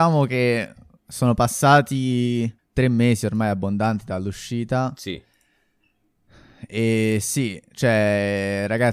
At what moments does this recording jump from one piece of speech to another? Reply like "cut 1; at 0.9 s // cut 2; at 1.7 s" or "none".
cut 1; at 2.6 s